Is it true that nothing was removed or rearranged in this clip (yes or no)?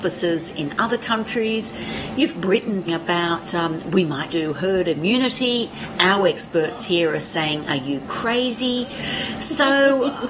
no